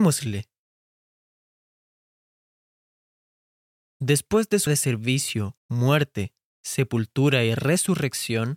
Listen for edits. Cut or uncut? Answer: cut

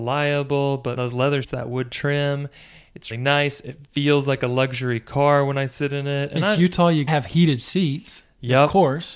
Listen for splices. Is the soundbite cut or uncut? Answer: cut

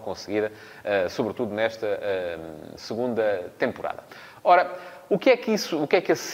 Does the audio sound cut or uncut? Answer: uncut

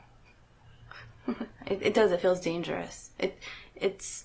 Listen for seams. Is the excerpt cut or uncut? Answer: uncut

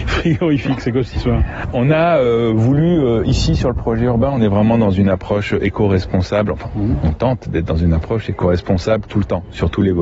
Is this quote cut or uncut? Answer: uncut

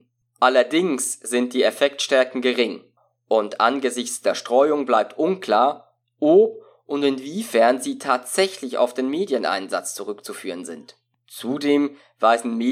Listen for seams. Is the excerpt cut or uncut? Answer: uncut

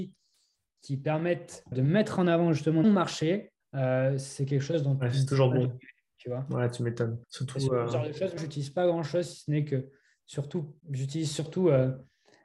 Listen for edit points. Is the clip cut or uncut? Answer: cut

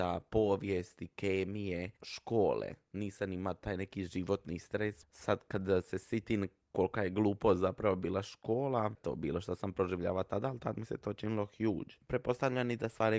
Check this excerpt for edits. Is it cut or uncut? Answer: cut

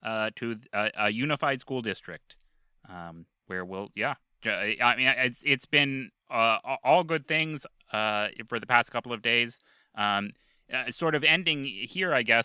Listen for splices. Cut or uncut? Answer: uncut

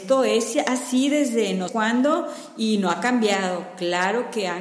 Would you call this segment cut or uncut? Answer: cut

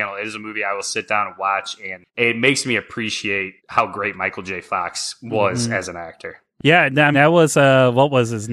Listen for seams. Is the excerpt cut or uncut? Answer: cut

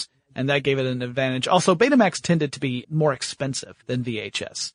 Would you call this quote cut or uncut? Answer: cut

